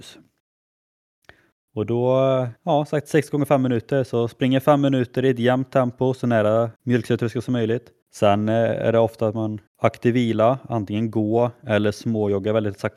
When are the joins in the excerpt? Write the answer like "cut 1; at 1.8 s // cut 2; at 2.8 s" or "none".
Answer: cut 1; at 2.6 s // cut 2; at 6.8 s // cut 3; at 8.0 s // cut 4; at 9.7 s